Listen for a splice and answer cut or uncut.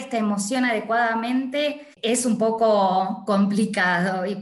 cut